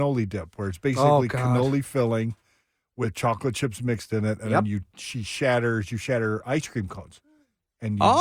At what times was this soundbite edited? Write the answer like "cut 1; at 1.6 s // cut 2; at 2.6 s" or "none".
none

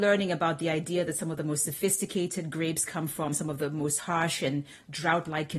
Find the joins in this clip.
none

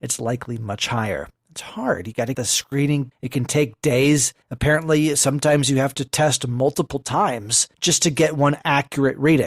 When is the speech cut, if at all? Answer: cut 1; at 1.4 s // cut 2; at 2.3 s // cut 3; at 3.1 s // cut 4; at 4.4 s // cut 5; at 7.7 s

